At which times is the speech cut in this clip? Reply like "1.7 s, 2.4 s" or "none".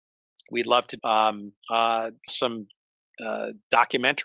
1.0 s, 1.6 s, 2.3 s